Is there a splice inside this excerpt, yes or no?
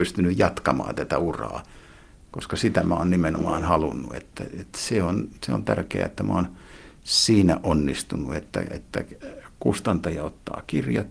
no